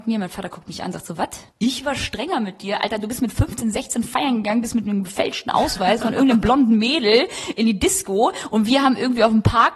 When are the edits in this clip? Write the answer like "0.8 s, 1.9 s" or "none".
1.5 s